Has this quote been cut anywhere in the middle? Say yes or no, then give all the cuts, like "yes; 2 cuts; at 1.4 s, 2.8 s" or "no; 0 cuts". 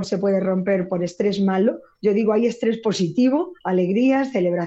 yes; 1 cut; at 3.6 s